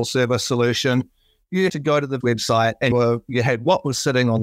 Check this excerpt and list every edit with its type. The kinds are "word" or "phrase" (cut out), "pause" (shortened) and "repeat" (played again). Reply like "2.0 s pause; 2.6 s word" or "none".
1.7 s word; 2.2 s word; 2.9 s word